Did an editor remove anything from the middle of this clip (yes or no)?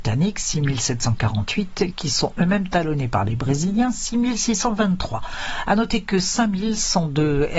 no